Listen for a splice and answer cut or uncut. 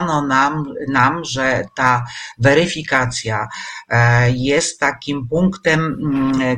uncut